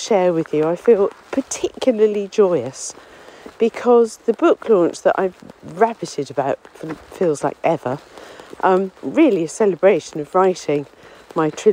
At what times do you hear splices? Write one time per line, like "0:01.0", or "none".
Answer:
0:01.2
0:08.9